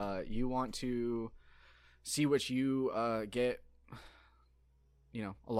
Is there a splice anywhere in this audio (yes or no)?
no